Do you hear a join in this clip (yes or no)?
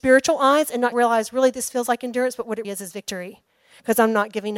yes